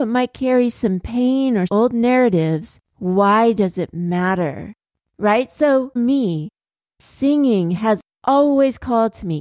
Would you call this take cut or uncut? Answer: cut